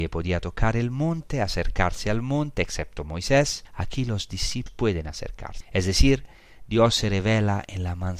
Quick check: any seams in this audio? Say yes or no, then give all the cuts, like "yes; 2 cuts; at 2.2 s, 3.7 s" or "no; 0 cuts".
no; 0 cuts